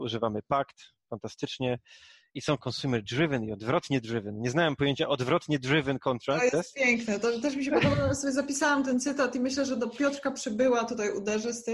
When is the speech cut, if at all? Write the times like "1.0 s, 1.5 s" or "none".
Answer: none